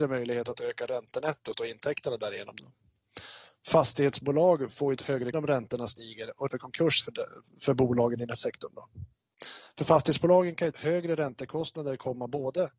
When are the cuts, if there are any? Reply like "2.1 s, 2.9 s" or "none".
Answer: 5.0 s, 5.3 s, 6.5 s, 7.0 s, 8.3 s, 10.7 s